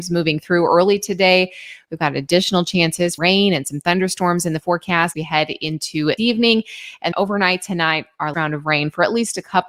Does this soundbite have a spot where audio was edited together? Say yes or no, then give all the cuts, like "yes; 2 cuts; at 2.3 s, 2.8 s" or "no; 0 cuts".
yes; 5 cuts; at 3.2 s, 5.1 s, 6.2 s, 7.1 s, 8.3 s